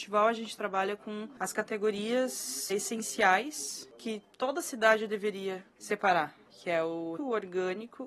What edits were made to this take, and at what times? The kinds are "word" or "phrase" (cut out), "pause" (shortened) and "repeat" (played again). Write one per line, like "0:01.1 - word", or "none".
0:02.7 - word
0:07.2 - word